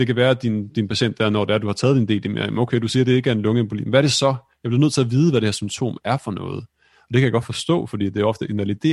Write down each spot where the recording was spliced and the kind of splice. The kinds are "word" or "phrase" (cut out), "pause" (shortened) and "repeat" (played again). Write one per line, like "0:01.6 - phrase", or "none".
none